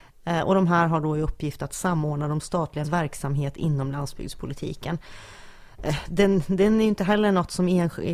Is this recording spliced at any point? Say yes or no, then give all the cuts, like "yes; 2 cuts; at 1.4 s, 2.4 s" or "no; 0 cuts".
yes; 1 cut; at 2.8 s